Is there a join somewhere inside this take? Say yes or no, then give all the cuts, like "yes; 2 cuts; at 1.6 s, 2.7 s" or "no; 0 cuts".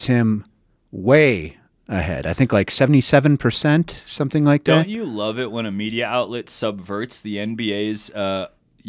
no; 0 cuts